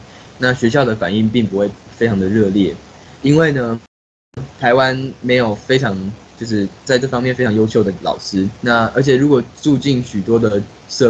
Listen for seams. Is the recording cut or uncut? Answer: cut